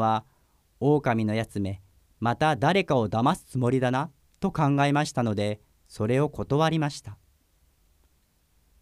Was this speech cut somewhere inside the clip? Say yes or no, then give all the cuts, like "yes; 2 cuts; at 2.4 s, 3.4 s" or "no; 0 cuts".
no; 0 cuts